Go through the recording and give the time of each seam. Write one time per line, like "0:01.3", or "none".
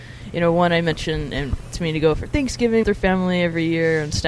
0:01.7
0:02.8